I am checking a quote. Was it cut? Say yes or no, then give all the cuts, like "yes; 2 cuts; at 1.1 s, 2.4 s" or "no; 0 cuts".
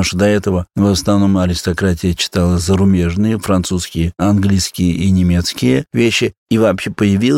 no; 0 cuts